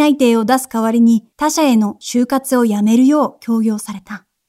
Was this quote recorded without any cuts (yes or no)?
no